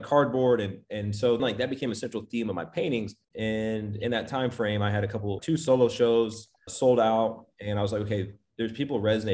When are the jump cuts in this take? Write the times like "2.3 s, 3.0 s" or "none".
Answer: 1.4 s, 3.2 s, 5.4 s, 6.7 s